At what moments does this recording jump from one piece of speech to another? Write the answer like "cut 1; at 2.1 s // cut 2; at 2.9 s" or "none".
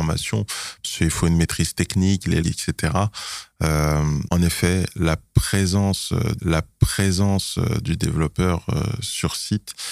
cut 1; at 2.4 s // cut 2; at 4.3 s // cut 3; at 6.4 s